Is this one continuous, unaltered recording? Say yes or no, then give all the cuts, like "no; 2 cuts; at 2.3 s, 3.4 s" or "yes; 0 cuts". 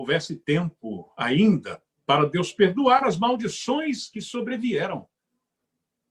yes; 0 cuts